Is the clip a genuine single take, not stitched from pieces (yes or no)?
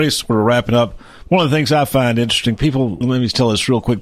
no